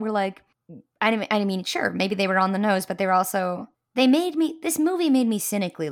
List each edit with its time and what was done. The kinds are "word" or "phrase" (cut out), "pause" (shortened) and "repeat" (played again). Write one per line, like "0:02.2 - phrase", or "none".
0:03.7 - pause